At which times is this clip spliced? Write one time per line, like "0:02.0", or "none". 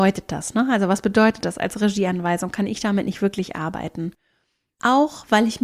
none